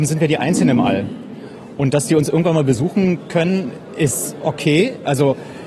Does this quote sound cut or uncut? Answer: uncut